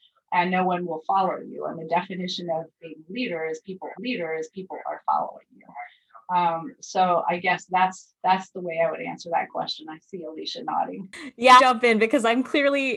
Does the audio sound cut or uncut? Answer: cut